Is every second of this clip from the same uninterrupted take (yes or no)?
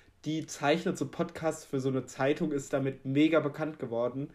yes